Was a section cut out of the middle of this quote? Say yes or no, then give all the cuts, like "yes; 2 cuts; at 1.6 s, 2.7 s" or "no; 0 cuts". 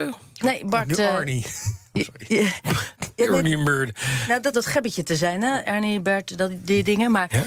yes; 2 cuts; at 2.9 s, 4.5 s